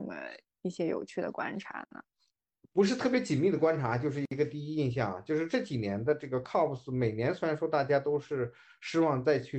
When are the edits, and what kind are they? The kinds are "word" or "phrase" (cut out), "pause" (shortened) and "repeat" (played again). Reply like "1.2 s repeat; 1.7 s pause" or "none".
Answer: none